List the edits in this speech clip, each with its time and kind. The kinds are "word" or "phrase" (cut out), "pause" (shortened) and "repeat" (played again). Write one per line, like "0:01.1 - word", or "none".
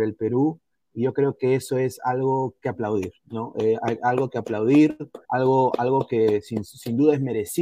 0:03.2 - pause
0:05.2 - pause